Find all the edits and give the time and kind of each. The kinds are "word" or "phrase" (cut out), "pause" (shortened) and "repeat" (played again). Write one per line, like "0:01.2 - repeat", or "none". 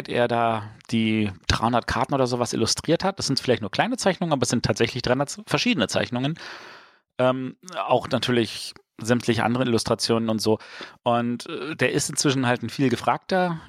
none